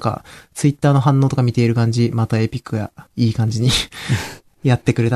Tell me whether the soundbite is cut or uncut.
cut